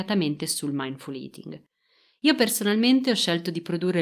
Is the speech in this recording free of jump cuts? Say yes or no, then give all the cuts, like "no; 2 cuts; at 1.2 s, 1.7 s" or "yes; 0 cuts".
yes; 0 cuts